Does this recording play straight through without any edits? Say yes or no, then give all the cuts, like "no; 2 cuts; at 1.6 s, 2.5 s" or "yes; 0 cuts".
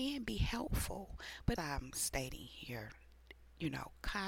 no; 1 cut; at 1.6 s